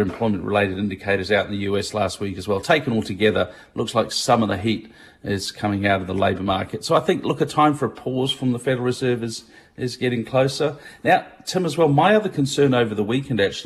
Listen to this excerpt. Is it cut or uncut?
uncut